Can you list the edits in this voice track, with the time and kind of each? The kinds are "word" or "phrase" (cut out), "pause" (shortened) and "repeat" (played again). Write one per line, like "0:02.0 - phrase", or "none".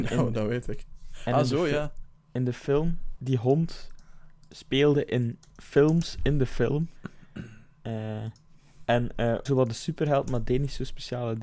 0:03.2 - word
0:09.5 - phrase